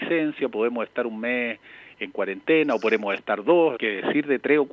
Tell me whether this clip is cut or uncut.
cut